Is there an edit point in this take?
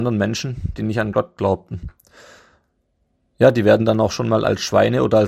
no; 0 cuts

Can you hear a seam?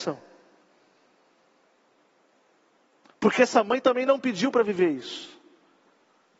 no; 0 cuts

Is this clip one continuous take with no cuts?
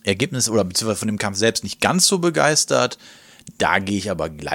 yes; 0 cuts

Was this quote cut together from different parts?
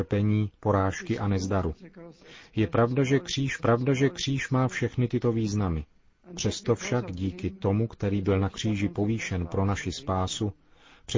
yes; 1 cut; at 3.6 s

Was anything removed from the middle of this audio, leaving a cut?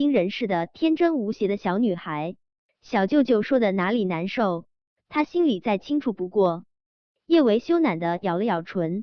no; 0 cuts

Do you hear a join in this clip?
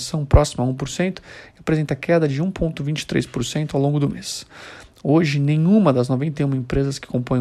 no; 0 cuts

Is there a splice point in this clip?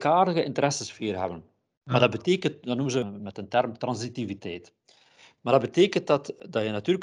no; 0 cuts

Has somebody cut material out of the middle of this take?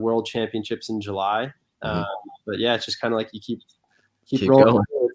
no; 0 cuts

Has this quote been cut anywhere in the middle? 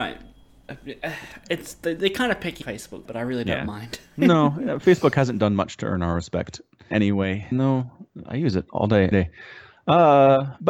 yes; 5 cuts; at 2.6 s, 3.1 s, 6.9 s, 7.5 s, 9.1 s

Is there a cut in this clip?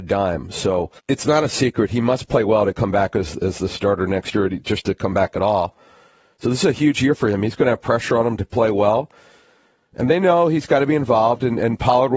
yes; 1 cut; at 1.0 s

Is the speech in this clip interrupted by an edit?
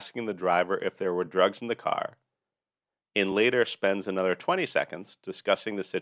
no; 0 cuts

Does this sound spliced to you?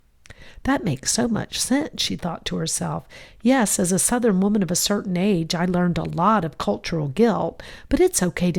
no; 0 cuts

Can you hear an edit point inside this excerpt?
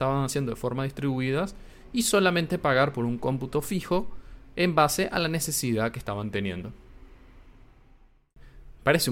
no; 0 cuts

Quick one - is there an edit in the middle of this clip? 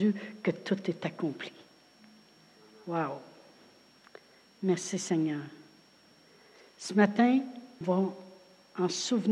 yes; 1 cut; at 7.8 s

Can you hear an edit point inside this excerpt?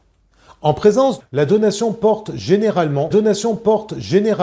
yes; 2 cuts; at 1.2 s, 3.1 s

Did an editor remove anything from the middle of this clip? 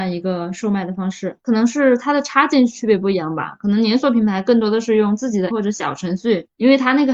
yes; 1 cut; at 5.5 s

